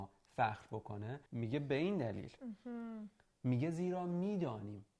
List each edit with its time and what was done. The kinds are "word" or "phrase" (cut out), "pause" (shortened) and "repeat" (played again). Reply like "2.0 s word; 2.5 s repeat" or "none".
1.3 s pause